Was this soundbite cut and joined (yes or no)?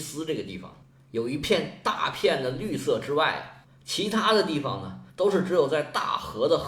yes